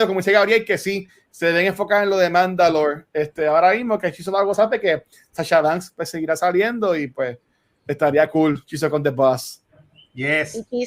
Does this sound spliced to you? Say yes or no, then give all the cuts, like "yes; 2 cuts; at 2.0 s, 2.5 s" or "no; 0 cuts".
no; 0 cuts